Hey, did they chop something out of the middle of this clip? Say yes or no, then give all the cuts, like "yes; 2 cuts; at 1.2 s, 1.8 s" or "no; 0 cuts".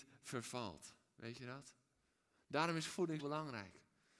yes; 1 cut; at 3.2 s